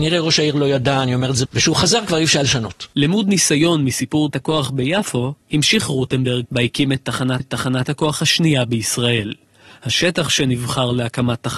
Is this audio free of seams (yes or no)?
no